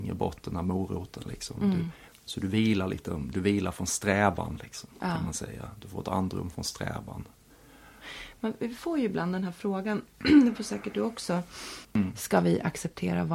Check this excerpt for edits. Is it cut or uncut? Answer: cut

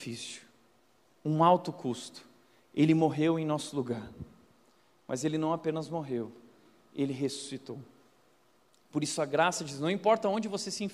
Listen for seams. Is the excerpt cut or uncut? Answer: uncut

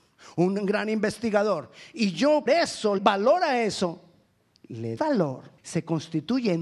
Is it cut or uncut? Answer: cut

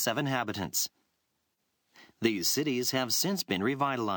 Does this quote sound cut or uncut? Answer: uncut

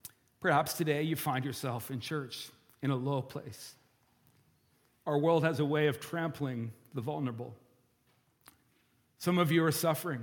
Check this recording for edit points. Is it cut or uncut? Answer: uncut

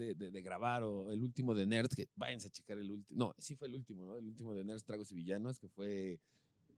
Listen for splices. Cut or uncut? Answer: uncut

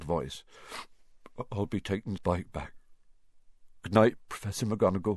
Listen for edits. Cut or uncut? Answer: cut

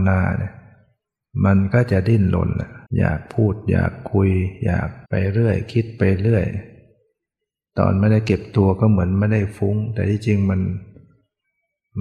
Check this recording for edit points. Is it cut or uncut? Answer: cut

